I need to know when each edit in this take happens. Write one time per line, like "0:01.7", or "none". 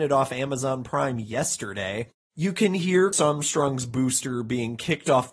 0:03.1